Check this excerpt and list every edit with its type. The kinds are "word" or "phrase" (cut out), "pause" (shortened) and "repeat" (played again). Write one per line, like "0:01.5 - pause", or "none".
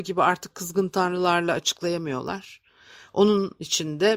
none